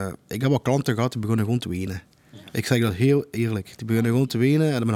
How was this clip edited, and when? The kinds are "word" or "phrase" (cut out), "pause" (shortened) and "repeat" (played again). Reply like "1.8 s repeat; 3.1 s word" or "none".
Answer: none

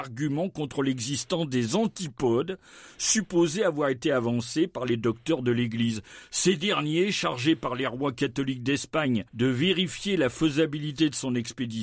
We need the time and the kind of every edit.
9.3 s pause

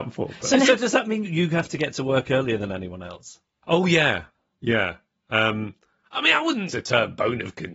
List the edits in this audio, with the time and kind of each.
1.2 s word; 6.7 s word

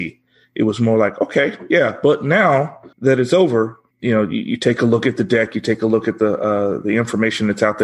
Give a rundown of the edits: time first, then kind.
2.9 s pause; 3.9 s pause

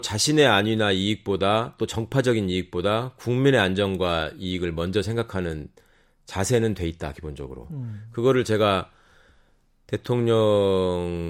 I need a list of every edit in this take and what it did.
none

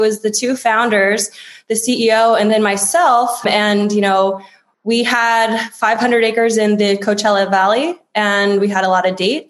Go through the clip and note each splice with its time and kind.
none

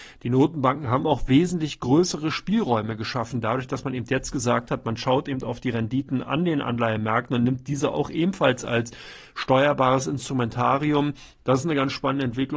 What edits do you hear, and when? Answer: none

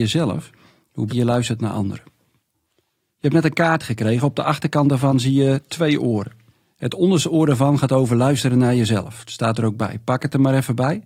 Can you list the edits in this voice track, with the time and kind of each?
1.1 s word

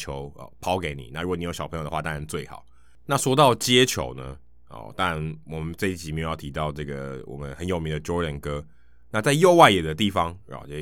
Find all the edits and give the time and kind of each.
none

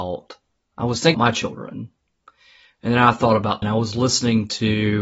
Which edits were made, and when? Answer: 1.1 s word; 3.6 s word

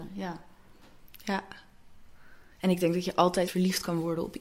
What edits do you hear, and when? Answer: 2.5 s pause; 3.5 s word

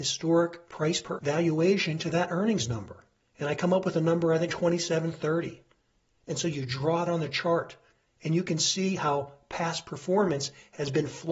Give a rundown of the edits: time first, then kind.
1.2 s word; 4.5 s word; 7.1 s word

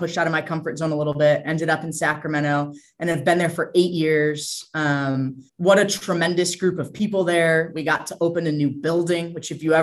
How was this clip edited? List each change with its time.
5.5 s pause

